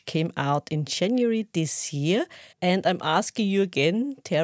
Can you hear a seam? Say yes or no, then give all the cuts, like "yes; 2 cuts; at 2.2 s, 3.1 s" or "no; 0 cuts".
yes; 1 cut; at 2.5 s